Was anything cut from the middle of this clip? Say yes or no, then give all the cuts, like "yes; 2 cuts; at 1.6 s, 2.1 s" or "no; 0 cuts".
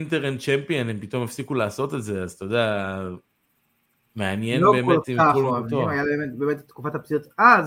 no; 0 cuts